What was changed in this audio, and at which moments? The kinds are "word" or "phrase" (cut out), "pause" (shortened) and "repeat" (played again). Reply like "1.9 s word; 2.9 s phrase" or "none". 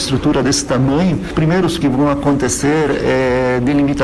1.8 s phrase